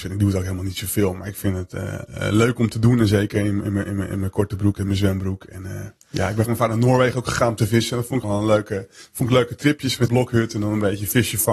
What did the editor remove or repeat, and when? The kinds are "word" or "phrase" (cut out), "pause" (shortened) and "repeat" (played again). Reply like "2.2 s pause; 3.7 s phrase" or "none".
6.0 s pause; 6.5 s word; 8.2 s word; 10.1 s phrase